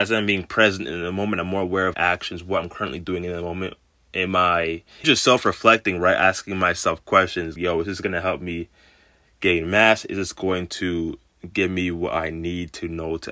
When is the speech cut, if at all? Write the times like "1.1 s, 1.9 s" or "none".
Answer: 1.9 s, 5.0 s, 7.6 s